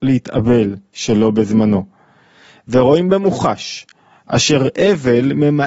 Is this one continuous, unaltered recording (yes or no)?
yes